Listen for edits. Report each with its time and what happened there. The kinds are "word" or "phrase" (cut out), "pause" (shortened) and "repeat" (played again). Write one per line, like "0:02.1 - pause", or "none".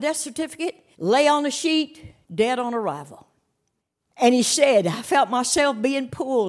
0:00.9 - pause
0:02.2 - pause
0:03.8 - pause